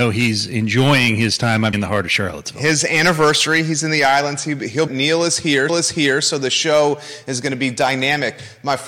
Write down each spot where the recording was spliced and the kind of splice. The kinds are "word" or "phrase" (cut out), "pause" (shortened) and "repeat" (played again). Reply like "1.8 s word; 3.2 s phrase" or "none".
1.7 s phrase; 4.9 s phrase; 5.7 s repeat